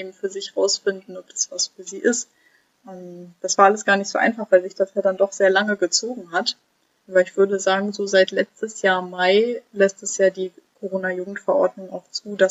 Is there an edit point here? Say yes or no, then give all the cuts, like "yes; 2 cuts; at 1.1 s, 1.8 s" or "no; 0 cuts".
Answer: no; 0 cuts